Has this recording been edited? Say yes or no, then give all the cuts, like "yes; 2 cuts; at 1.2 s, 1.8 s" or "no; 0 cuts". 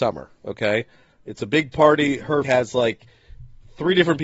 yes; 1 cut; at 2.4 s